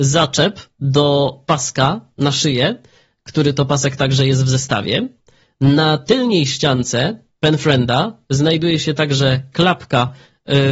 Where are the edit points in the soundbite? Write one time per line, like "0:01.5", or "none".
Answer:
none